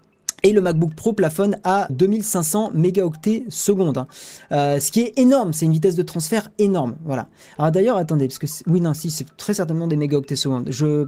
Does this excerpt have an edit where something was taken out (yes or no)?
yes